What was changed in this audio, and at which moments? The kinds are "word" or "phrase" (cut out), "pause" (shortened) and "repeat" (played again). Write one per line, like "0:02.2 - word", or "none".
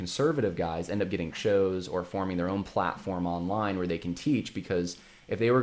0:01.3 - word